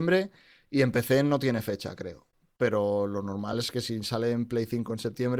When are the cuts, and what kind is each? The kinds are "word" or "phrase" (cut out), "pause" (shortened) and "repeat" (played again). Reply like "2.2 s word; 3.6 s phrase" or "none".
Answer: none

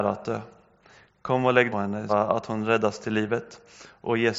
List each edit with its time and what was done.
1.7 s phrase; 2.1 s word

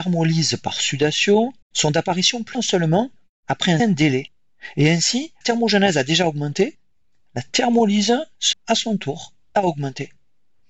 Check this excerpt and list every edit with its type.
1.6 s pause; 2.5 s phrase; 3.8 s word; 5.4 s phrase; 8.5 s word

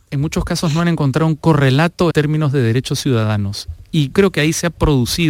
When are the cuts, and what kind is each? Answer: 2.1 s word; 4.1 s word

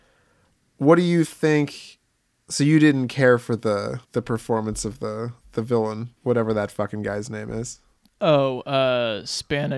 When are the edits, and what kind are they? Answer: 4.0 s pause; 5.4 s pause; 6.2 s pause

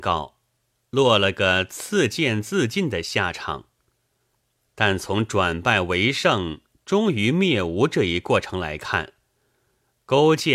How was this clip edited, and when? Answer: none

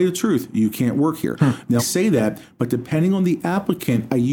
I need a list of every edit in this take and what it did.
1.8 s word

